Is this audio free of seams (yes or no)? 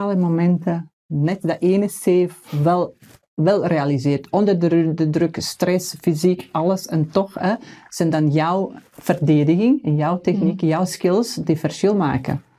no